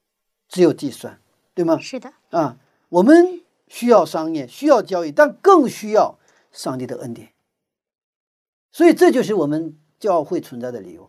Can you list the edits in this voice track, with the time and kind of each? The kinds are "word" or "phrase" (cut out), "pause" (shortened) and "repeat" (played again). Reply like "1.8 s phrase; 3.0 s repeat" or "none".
2.2 s pause